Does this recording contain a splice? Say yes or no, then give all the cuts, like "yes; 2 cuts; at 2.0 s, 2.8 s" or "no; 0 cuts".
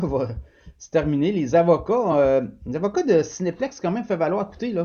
no; 0 cuts